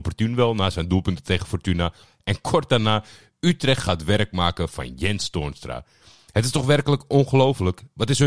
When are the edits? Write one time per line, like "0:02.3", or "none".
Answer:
none